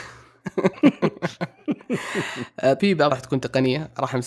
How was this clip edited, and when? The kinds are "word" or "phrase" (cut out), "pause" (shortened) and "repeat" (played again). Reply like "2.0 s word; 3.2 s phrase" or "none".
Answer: 2.8 s word; 3.1 s word